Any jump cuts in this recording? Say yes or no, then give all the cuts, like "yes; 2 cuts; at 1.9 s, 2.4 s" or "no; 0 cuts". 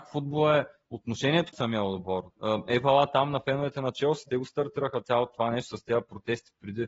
yes; 1 cut; at 1.5 s